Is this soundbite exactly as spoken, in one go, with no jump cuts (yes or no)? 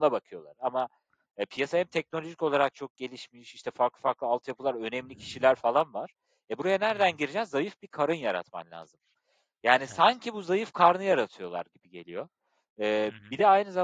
yes